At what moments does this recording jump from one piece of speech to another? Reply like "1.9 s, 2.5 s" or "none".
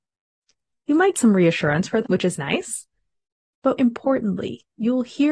1.1 s, 2.0 s, 3.8 s